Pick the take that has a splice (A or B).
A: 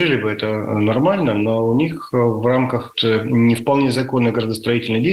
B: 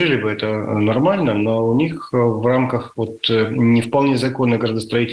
A